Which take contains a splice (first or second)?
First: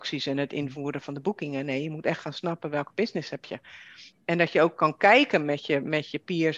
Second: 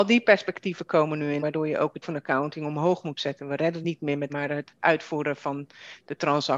second